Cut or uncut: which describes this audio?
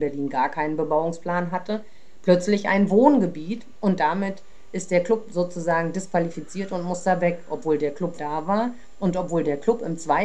cut